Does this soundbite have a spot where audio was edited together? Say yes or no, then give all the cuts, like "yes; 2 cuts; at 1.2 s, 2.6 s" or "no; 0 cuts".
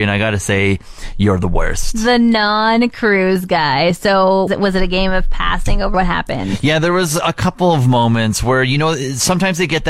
yes; 2 cuts; at 4.5 s, 5.9 s